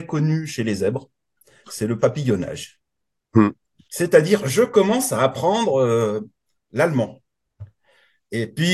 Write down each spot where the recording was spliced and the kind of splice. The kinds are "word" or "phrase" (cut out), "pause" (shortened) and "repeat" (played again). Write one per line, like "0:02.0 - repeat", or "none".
none